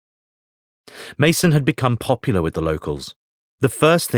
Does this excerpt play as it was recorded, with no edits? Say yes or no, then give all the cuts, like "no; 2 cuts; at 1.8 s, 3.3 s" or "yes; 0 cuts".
yes; 0 cuts